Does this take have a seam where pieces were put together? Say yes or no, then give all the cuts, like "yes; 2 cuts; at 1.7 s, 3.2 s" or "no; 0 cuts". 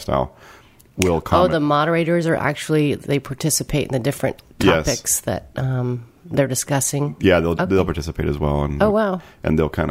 no; 0 cuts